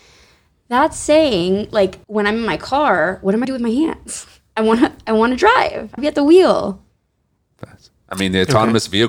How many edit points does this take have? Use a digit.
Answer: 3